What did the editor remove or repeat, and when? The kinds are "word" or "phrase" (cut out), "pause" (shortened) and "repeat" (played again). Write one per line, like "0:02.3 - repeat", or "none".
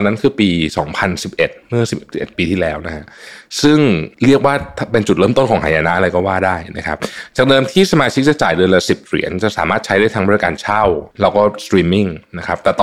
0:01.6 - pause
0:04.1 - pause
0:11.1 - pause

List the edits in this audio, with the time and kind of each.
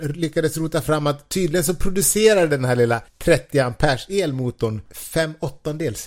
0:03.1 - pause

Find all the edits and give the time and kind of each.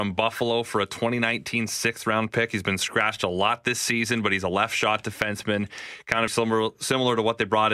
0:06.3 - word

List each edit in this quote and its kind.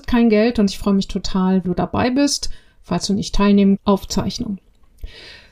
0:01.6 - word
0:03.8 - phrase

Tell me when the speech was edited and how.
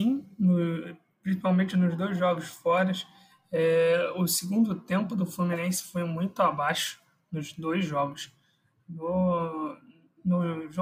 none

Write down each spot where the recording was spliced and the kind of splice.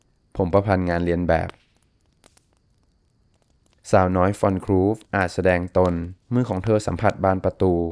0:05.0 - pause
0:06.2 - pause

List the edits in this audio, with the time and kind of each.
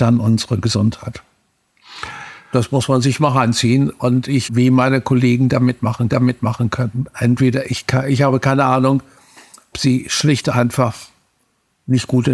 0:04.4 - word
0:06.1 - repeat
0:09.7 - word

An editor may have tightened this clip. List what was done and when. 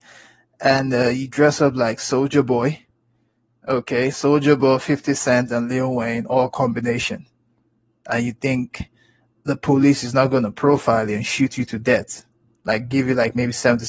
none

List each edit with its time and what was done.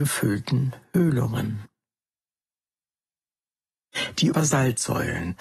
0:04.3 - word

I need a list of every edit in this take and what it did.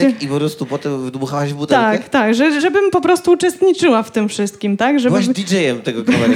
0:02.6 - word

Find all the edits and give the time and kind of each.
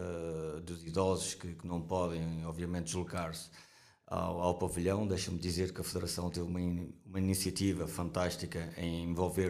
none

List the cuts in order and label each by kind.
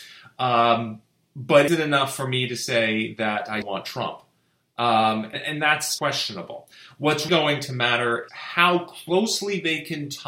0:01.7 - word
0:03.6 - word
0:05.3 - word
0:06.0 - word
0:07.3 - word
0:08.3 - word

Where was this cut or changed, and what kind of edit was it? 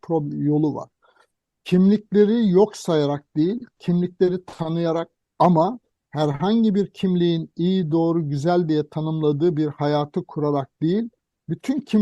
none

